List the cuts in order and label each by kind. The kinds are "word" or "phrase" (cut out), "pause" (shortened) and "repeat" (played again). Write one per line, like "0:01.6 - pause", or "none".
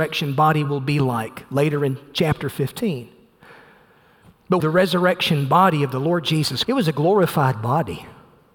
0:04.6 - phrase
0:06.6 - word